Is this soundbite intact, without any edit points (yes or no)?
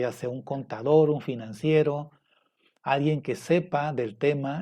yes